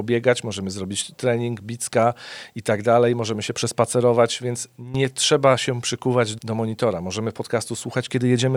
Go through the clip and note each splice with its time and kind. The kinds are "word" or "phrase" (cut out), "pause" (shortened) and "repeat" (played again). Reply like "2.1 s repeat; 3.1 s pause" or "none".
6.4 s word

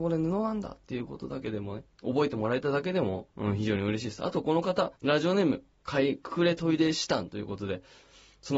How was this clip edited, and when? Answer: 1.9 s pause; 3.3 s pause; 5.0 s pause

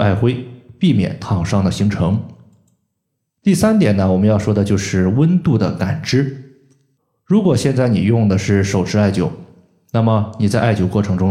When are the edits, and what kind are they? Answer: 3.0 s pause; 7.0 s pause

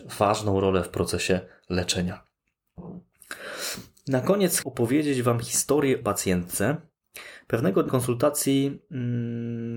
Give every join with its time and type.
4.6 s word; 6.0 s phrase; 7.9 s word

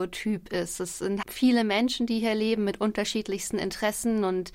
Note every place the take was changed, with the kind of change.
1.2 s word

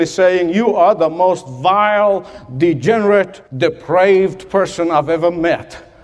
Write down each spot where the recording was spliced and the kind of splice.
3.5 s pause

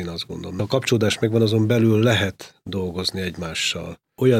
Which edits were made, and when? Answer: none

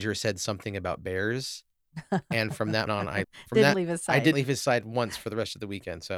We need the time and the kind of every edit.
2.9 s word; 3.2 s word; 3.7 s word; 4.3 s word

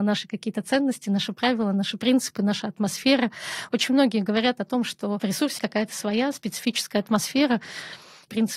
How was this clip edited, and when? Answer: 5.6 s word

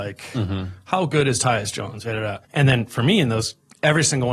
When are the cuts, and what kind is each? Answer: 2.4 s pause

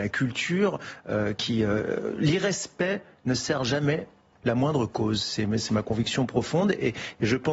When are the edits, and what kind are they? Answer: none

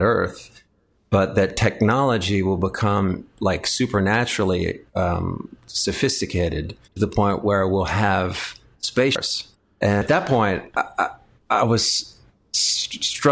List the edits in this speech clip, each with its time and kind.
4.9 s pause; 6.8 s pause; 9.5 s pause

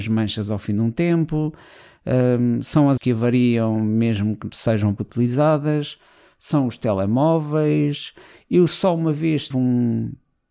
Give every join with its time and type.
3.0 s word; 5.0 s word; 9.5 s word

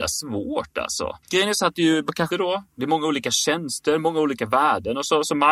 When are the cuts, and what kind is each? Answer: 1.2 s pause; 2.3 s phrase

